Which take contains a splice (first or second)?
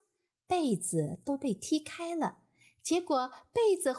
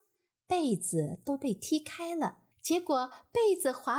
second